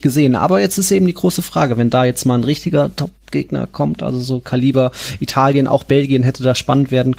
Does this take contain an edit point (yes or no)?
no